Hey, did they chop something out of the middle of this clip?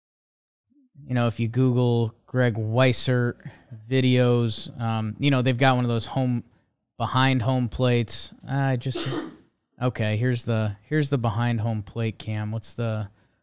no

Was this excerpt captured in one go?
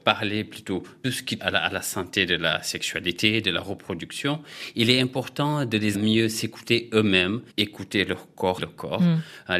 no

